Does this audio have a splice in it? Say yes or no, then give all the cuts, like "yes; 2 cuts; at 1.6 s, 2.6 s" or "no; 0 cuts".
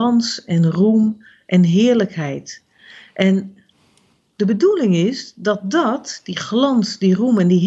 no; 0 cuts